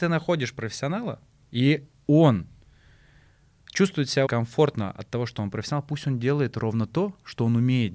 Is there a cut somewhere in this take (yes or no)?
yes